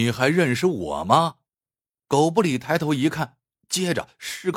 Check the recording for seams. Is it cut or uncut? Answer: cut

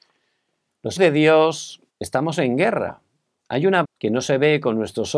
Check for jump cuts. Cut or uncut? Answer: cut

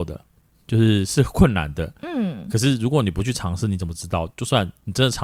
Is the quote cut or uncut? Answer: uncut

